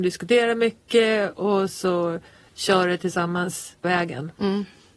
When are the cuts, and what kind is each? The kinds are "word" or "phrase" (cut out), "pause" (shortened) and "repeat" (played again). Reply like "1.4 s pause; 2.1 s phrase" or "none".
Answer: 1.7 s word; 3.8 s word